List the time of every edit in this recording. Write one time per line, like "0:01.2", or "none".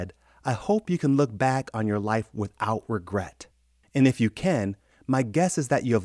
none